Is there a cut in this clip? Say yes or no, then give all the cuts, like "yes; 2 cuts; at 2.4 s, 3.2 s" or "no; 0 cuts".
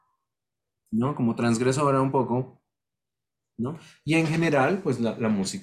no; 0 cuts